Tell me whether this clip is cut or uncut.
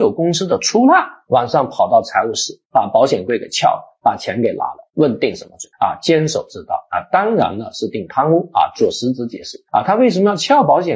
cut